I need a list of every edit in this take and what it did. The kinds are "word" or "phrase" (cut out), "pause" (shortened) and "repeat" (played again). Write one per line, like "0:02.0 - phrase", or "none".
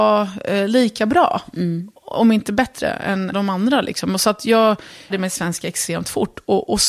0:03.3 - word
0:05.1 - phrase

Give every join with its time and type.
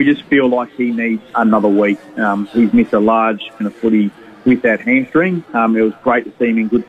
0:01.3 - word
0:03.6 - word

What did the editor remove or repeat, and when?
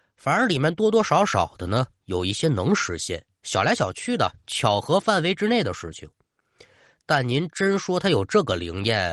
none

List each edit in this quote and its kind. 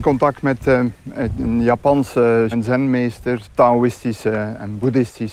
0:02.5 - word
0:03.4 - word

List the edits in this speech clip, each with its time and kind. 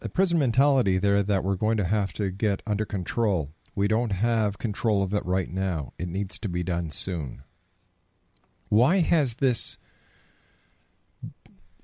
0:07.8 - pause

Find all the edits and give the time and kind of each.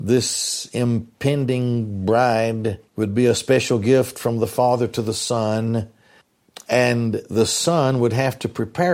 0:02.9 - pause
0:06.2 - pause

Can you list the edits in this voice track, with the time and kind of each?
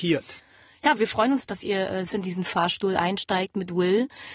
0:01.0 - word
0:01.5 - word
0:02.1 - word

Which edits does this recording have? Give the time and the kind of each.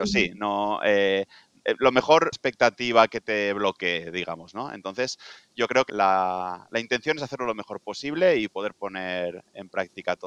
0:02.3 - phrase
0:05.9 - word

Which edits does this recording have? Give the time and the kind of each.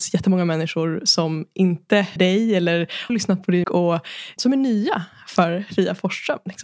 0:02.2 - phrase
0:03.1 - word
0:03.6 - word
0:04.4 - word

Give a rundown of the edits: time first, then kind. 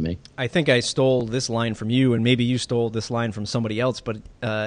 none

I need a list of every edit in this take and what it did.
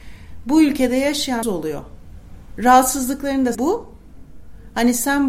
0:01.4 - phrase
0:03.5 - word

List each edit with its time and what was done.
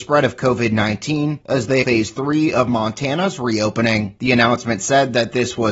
0:01.8 - word

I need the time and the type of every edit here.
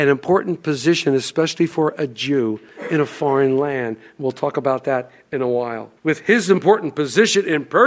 0:06.0 - pause

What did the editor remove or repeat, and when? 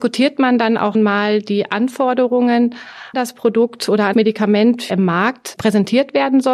0:00.9 - word
0:03.1 - word
0:04.1 - word
0:04.9 - phrase

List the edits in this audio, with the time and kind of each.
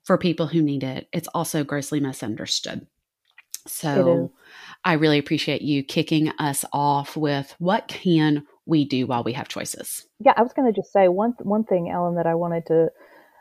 0:10.1 - pause

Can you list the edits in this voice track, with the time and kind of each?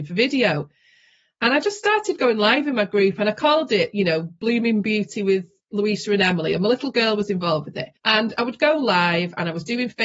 0:08.0 - pause

